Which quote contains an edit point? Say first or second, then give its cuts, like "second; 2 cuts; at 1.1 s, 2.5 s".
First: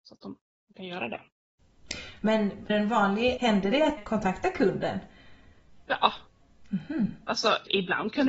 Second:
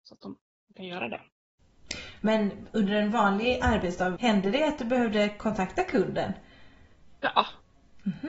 first; 3 cuts; at 2.7 s, 3.4 s, 4.0 s